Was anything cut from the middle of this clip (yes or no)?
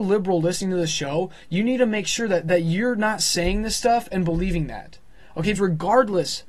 yes